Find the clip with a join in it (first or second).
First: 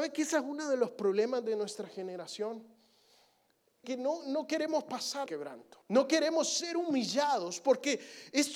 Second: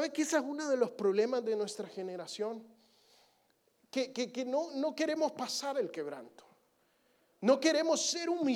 first